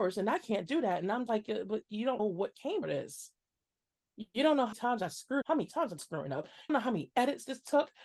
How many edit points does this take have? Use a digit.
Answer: 7